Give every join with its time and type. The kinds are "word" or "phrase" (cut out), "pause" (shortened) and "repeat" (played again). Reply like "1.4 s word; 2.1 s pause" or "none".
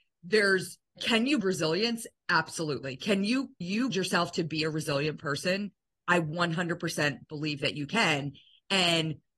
1.0 s word; 1.4 s word; 3.6 s word; 3.9 s word